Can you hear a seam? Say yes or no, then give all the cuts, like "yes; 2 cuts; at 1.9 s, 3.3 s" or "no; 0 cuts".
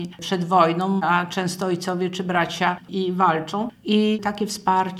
yes; 1 cut; at 2.9 s